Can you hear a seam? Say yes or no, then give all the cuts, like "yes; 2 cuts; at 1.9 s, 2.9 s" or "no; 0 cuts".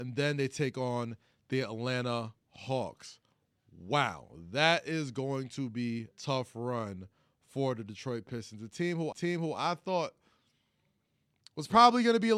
yes; 2 cuts; at 6.1 s, 9.1 s